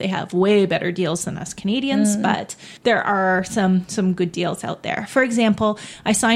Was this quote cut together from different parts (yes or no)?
yes